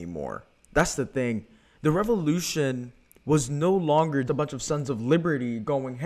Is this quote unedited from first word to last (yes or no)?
no